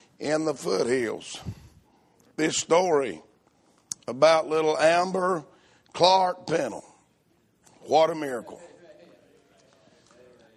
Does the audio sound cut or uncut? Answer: uncut